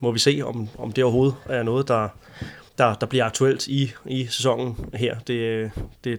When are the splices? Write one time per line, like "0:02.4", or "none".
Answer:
0:02.7